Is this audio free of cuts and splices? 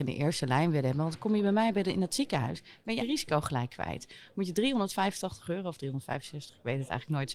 no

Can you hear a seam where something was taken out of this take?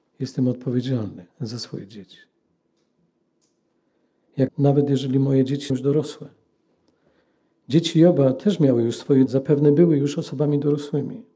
yes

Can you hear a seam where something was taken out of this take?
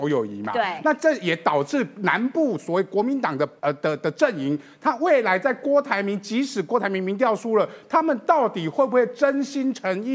yes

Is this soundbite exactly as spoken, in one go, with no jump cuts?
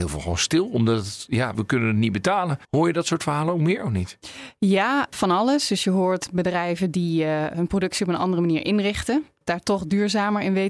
no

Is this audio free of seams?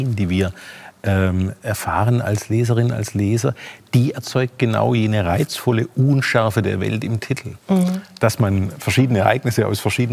no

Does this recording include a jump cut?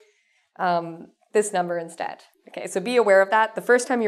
yes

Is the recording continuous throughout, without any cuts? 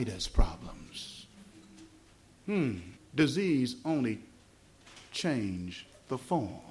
no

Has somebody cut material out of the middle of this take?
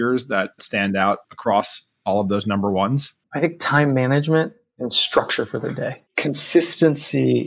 yes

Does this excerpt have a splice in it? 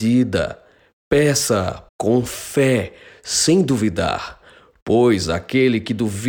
yes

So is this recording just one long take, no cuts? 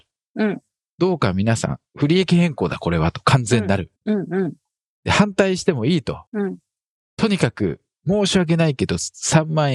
no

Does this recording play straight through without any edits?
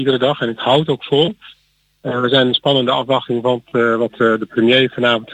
yes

